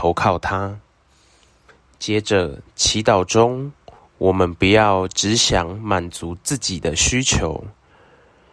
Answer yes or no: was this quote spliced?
no